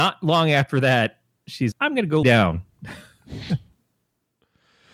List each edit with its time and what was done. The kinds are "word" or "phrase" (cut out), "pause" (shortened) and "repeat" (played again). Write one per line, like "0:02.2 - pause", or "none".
0:01.7 - word
0:02.2 - word